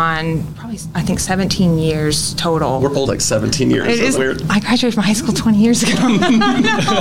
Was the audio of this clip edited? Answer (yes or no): yes